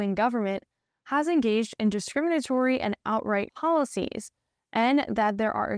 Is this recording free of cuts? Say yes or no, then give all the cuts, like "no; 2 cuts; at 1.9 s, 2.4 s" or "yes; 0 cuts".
no; 1 cut; at 3.5 s